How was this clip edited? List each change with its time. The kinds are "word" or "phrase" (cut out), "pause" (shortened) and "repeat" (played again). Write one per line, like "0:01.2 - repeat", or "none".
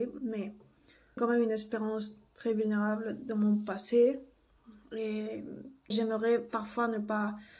0:01.2 - word
0:05.9 - word